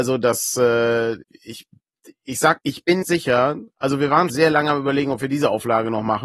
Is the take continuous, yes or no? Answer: no